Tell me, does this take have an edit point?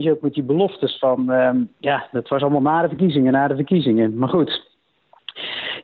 yes; 1 cut; at 1.7 s

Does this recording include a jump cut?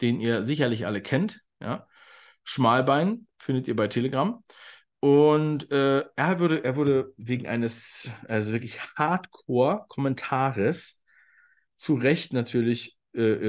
no; 0 cuts

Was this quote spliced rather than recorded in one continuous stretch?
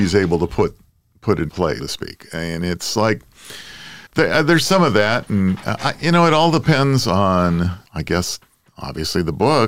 yes; 4 cuts; at 1.5 s, 1.8 s, 4.1 s, 7.9 s

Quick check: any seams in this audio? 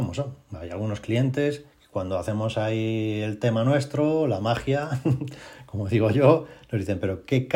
yes; 1 cut; at 1.7 s

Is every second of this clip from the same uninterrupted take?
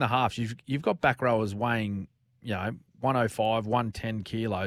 no; 1 cut; at 2.9 s

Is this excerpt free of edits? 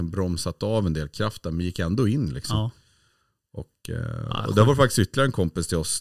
yes; 0 cuts

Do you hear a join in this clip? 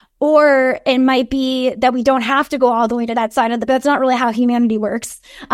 yes; 1 cut; at 3.7 s

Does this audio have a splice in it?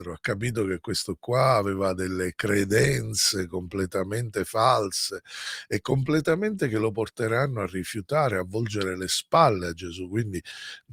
no; 0 cuts

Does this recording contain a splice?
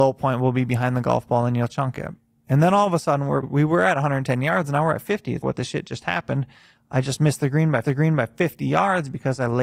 yes; 3 cuts; at 3.4 s, 5.4 s, 7.8 s

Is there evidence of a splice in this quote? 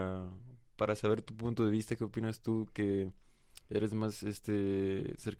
no; 0 cuts

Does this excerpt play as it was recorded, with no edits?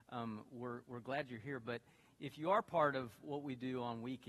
yes; 0 cuts

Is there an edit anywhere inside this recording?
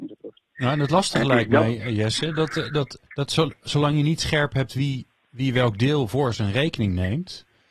yes; 1 cut; at 3.1 s

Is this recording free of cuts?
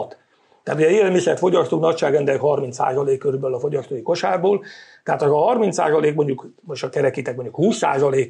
yes; 0 cuts

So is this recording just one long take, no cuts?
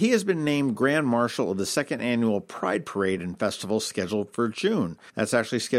yes; 0 cuts

